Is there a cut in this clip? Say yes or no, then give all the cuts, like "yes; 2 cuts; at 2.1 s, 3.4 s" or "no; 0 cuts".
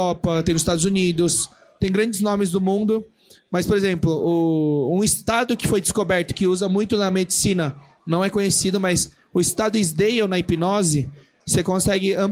no; 0 cuts